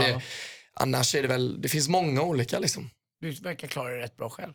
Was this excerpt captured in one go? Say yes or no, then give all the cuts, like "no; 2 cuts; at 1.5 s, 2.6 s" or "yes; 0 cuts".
yes; 0 cuts